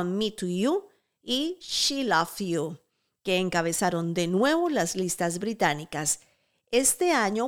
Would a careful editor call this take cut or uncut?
uncut